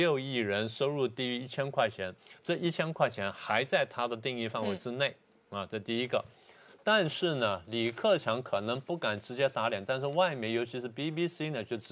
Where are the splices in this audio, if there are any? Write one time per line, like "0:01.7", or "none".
none